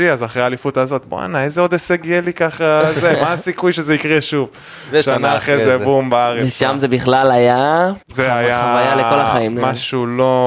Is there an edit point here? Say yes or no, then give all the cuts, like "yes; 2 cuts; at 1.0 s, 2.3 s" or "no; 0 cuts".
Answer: yes; 1 cut; at 8.0 s